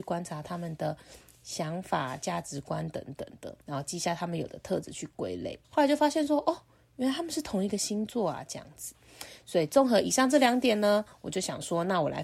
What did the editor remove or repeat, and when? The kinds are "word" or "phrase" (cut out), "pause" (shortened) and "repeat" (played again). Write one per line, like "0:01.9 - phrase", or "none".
0:03.6 - pause
0:05.6 - pause